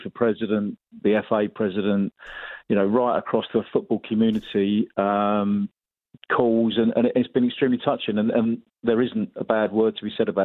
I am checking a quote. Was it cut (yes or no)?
no